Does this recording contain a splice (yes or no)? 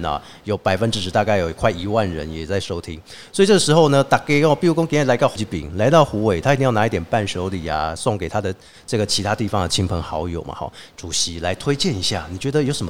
yes